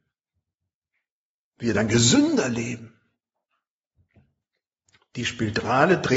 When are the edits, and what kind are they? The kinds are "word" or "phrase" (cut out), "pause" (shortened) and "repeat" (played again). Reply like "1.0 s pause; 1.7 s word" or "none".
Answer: none